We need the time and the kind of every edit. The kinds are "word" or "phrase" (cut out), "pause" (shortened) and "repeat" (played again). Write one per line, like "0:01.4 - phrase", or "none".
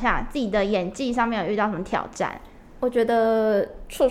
none